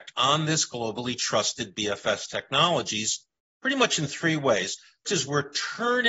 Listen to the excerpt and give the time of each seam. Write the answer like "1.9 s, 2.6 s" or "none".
5.0 s